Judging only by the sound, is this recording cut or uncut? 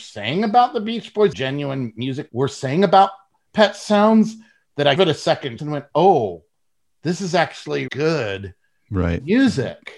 cut